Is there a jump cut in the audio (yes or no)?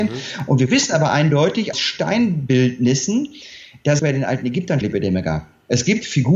yes